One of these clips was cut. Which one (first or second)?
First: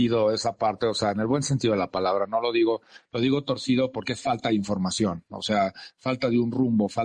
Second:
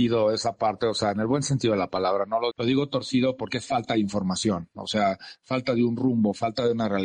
second